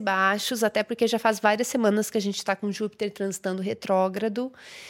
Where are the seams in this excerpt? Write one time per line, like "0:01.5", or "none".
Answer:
none